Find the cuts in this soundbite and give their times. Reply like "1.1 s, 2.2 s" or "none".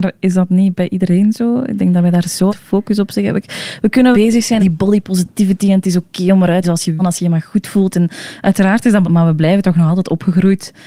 2.5 s, 4.1 s, 4.6 s, 6.6 s, 7.0 s, 9.0 s